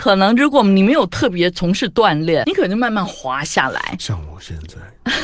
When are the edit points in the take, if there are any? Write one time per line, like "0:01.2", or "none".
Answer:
0:02.4